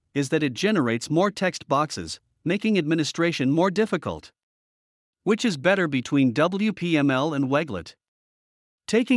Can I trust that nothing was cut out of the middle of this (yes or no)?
yes